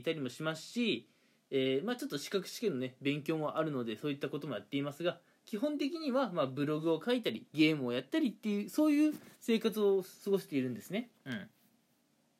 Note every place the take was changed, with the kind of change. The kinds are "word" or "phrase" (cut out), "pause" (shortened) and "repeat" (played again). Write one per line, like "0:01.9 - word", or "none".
0:09.3 - pause

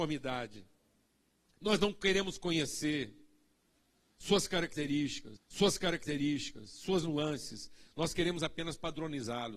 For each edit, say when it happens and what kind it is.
0:01.1 - pause
0:05.4 - repeat

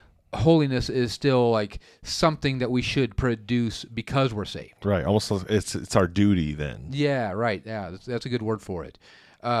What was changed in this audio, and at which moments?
none

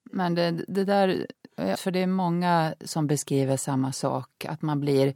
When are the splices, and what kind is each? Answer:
0:01.7 - phrase

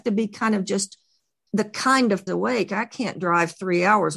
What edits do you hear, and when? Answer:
0:02.3 - phrase

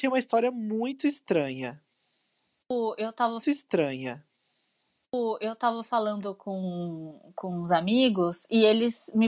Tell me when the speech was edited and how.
0:03.4 - repeat

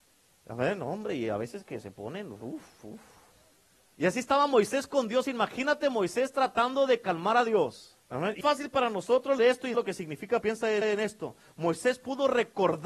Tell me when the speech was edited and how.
0:03.5 - pause
0:08.0 - pause
0:08.4 - word
0:09.4 - word
0:09.7 - word
0:10.4 - word
0:10.8 - repeat

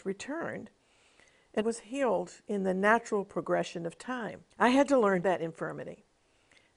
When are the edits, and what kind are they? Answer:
0:01.6 - word
0:04.5 - pause
0:05.2 - phrase

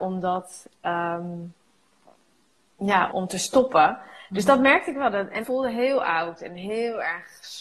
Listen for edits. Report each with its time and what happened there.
0:03.1 - word
0:05.4 - word

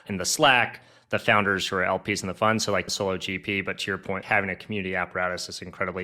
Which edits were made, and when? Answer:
0:02.9 - phrase
0:04.2 - word

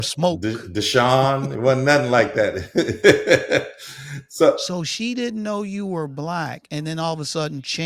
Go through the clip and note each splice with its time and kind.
none

